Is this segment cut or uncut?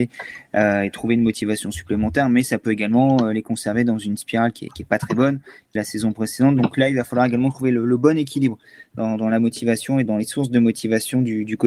cut